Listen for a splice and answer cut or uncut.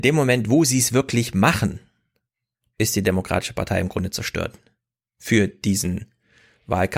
uncut